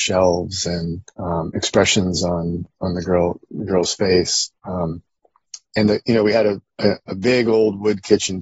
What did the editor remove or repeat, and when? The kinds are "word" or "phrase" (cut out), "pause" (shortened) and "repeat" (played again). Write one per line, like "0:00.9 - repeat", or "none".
0:01.1 - pause
0:04.6 - pause